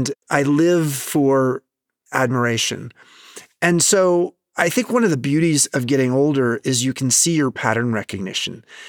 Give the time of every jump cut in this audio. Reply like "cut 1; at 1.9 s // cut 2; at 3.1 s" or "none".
none